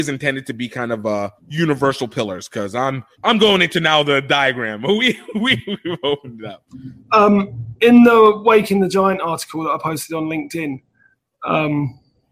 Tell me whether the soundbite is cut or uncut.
cut